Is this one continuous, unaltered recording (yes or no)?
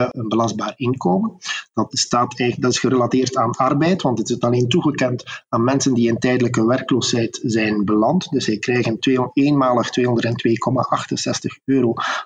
no